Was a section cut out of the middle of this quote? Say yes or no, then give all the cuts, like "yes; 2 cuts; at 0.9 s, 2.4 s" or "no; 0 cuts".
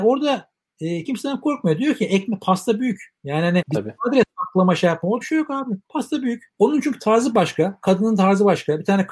yes; 5 cuts; at 1.0 s, 3.6 s, 5.2 s, 5.8 s, 6.5 s